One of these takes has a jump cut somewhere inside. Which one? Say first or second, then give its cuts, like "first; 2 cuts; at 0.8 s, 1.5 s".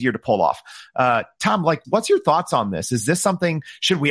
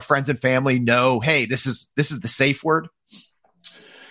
first; 1 cut; at 1.8 s